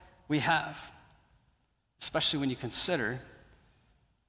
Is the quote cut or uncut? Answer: uncut